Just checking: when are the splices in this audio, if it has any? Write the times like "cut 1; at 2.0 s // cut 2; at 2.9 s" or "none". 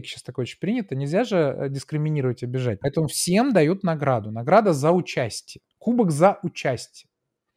cut 1; at 5.7 s